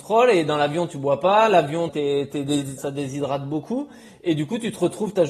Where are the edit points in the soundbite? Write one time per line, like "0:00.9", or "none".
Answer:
0:01.9
0:02.8